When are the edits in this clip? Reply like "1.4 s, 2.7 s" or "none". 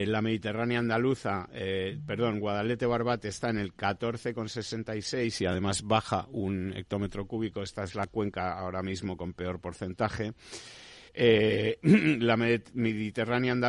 11.1 s